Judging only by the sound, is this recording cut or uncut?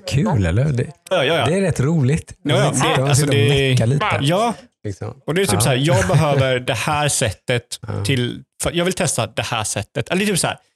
cut